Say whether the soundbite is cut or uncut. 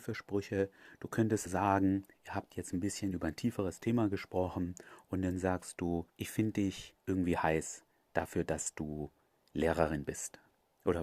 cut